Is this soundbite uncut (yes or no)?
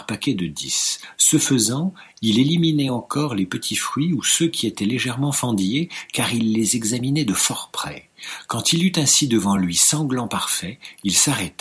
yes